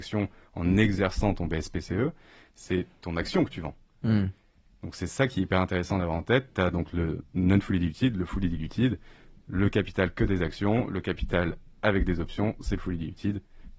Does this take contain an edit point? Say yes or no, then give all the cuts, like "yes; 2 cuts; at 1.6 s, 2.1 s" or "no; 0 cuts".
no; 0 cuts